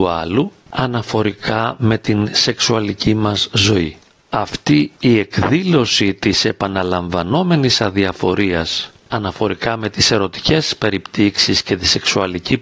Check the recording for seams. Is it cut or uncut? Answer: uncut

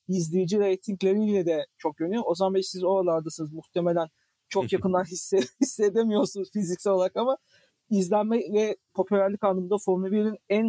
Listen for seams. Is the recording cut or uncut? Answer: cut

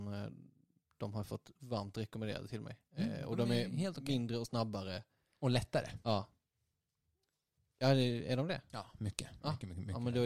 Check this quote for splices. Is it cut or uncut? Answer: uncut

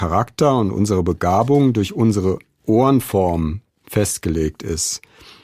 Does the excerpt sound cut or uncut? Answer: uncut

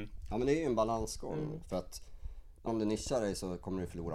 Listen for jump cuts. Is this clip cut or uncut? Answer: cut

